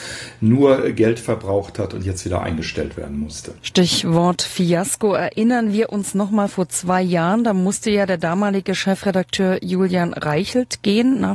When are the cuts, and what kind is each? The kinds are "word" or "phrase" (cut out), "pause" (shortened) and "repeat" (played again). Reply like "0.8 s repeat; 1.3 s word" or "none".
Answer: 3.6 s pause